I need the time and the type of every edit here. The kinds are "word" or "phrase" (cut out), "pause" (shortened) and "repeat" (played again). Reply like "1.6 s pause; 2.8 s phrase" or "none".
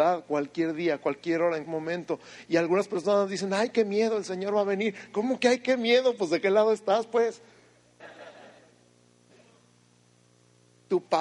1.7 s word

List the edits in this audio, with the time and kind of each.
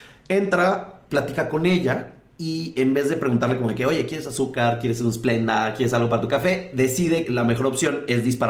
7.2 s word

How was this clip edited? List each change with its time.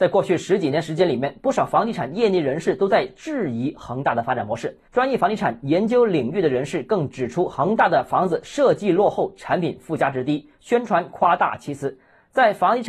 4.9 s pause

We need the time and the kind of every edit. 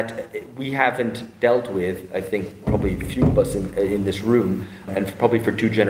4.9 s word

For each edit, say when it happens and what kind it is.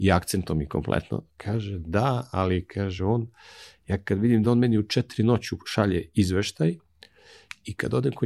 none

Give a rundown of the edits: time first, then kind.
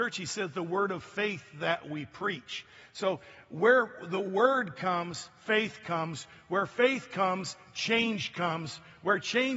none

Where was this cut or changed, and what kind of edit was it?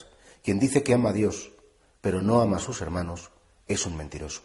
none

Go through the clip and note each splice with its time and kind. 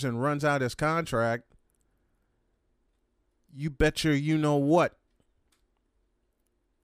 none

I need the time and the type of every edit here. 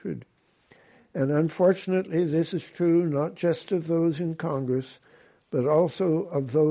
none

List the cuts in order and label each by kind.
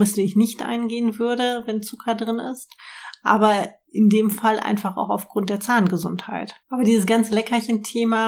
6.6 s pause

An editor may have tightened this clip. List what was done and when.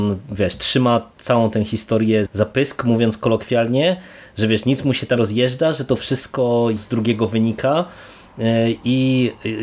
2.3 s word; 5.2 s word; 6.8 s word

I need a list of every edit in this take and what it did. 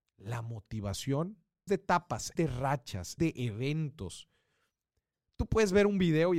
1.7 s word; 2.4 s word; 3.2 s word

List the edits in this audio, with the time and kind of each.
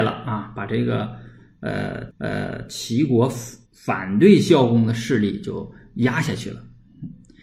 2.1 s repeat; 3.6 s pause

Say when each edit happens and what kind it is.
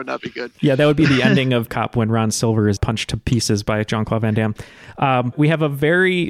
1.7 s word; 2.8 s word; 5.3 s word

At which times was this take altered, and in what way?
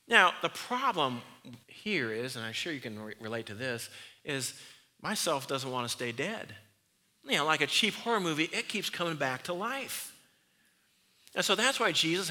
1.6 s pause; 6.9 s pause

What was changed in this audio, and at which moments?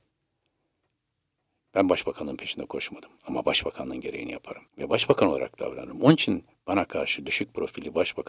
4.7 s pause

